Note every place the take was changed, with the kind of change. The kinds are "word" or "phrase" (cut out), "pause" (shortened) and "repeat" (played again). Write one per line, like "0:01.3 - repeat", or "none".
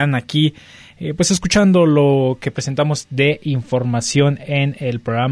none